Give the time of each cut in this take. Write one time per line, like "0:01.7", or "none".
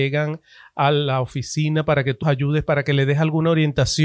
0:02.2